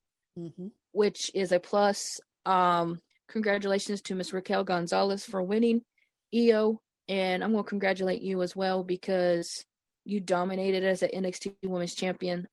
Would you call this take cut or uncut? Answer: uncut